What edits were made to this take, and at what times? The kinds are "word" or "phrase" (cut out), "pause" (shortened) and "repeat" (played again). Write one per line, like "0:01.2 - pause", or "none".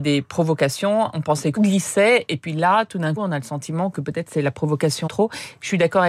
0:01.6 - word
0:03.2 - word
0:05.1 - word

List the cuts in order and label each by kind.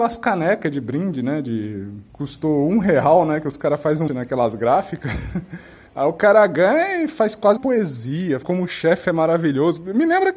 0:02.1 - word
0:04.1 - word
0:05.9 - pause
0:07.6 - word
0:08.4 - word

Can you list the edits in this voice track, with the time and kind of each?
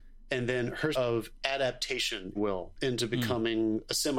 0:00.9 - word
0:02.3 - phrase

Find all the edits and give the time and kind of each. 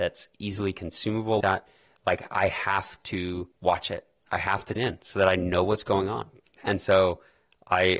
0:01.4 - word
0:03.5 - pause
0:04.8 - word
0:06.4 - pause

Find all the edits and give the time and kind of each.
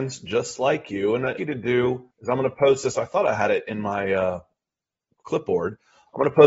0:01.4 - phrase
0:02.1 - pause

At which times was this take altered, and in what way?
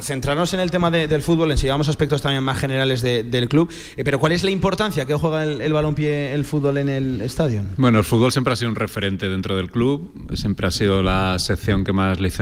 none

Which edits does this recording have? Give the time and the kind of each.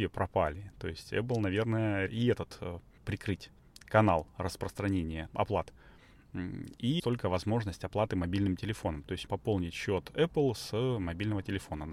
0:02.1 - word
0:03.0 - word
0:05.3 - word
0:07.0 - word
0:09.3 - word

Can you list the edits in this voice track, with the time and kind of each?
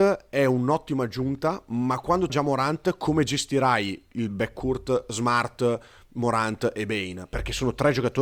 0:02.3 - word

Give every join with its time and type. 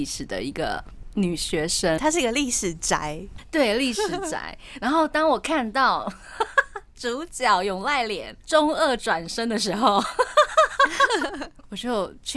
0:02.0 - word

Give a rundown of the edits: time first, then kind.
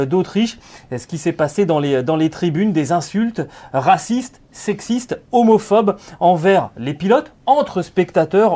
none

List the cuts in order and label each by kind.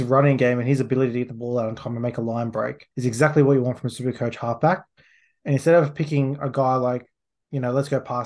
0:02.9 - pause

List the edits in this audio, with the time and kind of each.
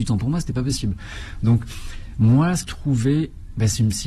0:02.7 - phrase

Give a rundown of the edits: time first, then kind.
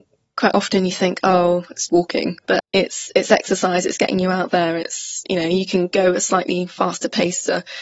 0:01.9 - word
0:02.6 - word

